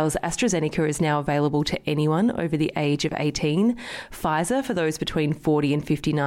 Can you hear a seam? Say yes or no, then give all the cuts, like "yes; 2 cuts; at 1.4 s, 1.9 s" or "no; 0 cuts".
no; 0 cuts